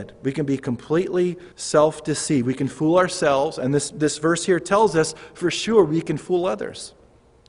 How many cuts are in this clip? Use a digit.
1